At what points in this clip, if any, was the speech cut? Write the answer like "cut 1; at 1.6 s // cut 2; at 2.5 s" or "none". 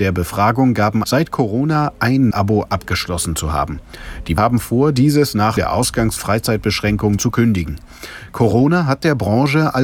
cut 1; at 1.0 s // cut 2; at 2.3 s // cut 3; at 4.4 s // cut 4; at 5.6 s // cut 5; at 6.2 s // cut 6; at 7.2 s